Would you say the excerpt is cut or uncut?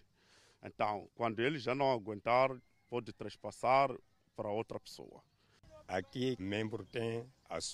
cut